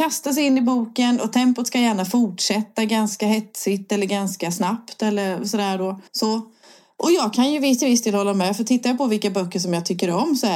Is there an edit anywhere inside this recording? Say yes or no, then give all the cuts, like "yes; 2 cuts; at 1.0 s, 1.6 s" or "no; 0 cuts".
yes; 1 cut; at 6.1 s